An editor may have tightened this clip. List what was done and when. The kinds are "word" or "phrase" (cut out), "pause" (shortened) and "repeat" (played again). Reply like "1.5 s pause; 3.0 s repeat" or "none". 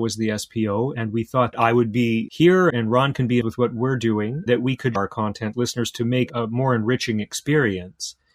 1.5 s word; 2.3 s word; 2.7 s word; 3.4 s word; 4.5 s word; 5.0 s word; 5.5 s word